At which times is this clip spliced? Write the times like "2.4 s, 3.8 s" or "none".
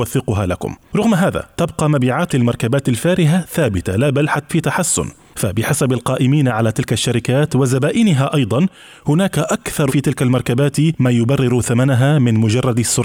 2.3 s, 4.5 s, 9.9 s